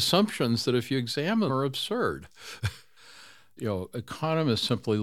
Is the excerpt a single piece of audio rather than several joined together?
no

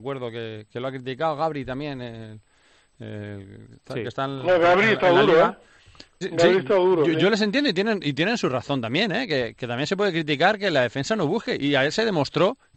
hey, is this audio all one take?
no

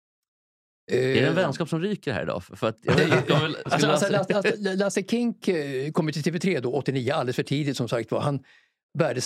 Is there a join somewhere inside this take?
no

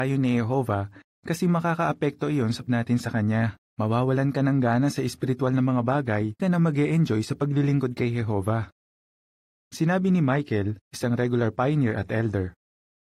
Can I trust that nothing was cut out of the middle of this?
no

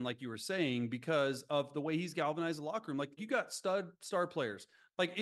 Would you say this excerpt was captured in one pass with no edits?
no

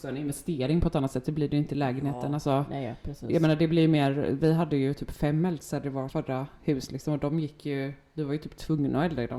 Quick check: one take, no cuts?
yes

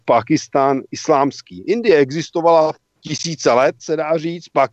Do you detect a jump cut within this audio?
yes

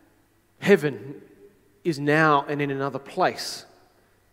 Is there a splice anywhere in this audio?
no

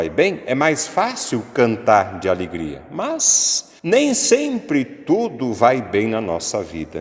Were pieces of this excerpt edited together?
yes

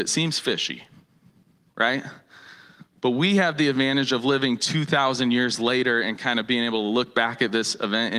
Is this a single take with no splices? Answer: yes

